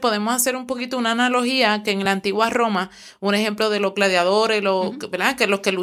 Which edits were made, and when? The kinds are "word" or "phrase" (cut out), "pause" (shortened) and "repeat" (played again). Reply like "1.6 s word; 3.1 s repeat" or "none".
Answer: none